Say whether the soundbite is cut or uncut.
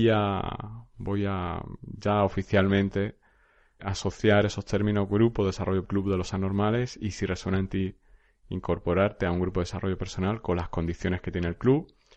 cut